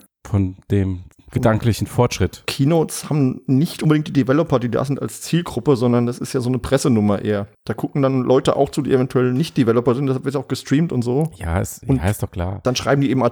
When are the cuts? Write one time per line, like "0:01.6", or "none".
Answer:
0:07.5